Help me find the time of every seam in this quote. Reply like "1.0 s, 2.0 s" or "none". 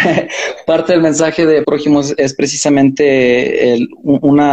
1.6 s